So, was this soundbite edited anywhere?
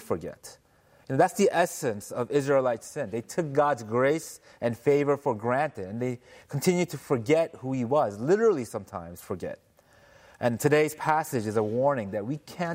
no; 0 cuts

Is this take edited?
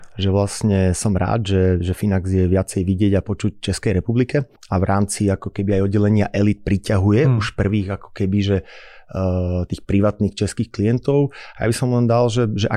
yes; 1 cut; at 4.6 s

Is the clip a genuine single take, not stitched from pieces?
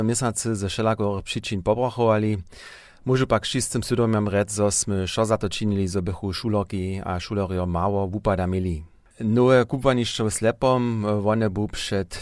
yes; 0 cuts

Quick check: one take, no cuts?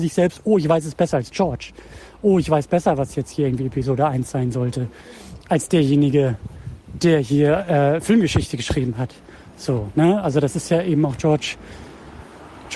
yes; 0 cuts

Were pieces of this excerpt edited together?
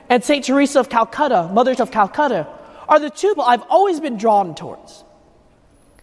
yes; 2 cuts; at 1.8 s, 3.4 s

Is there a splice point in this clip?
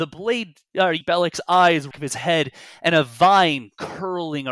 yes; 2 cuts; at 1.0 s, 1.9 s

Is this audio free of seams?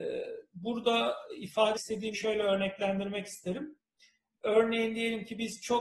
no; 2 cuts; at 1.8 s, 2.1 s

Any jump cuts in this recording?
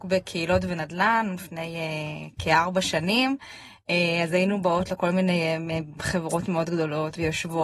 no; 0 cuts

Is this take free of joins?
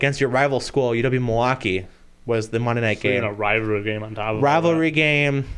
yes; 0 cuts

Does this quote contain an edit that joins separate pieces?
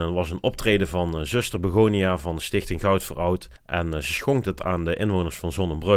yes; 1 cut; at 3.6 s

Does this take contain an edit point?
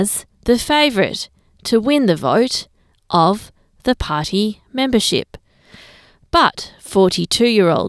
no; 0 cuts

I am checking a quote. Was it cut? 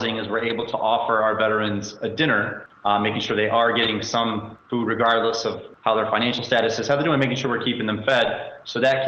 no; 0 cuts

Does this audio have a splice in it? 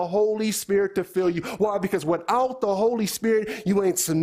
no; 0 cuts

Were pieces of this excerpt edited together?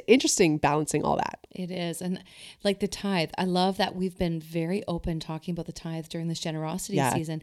yes; 1 cut; at 1.5 s

